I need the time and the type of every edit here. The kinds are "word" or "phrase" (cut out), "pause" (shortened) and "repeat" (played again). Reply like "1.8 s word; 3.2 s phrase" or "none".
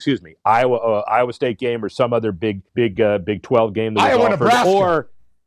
2.7 s pause